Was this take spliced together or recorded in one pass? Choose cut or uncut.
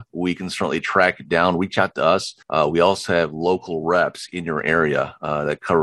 cut